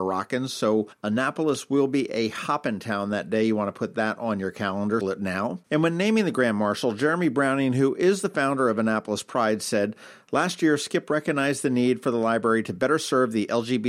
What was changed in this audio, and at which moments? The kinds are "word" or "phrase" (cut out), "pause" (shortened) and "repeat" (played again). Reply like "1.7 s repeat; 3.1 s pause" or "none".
5.0 s word